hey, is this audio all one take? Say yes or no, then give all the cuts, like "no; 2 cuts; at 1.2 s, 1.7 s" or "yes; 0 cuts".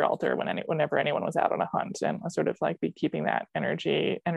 yes; 0 cuts